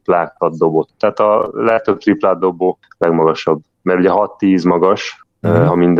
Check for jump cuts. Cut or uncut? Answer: uncut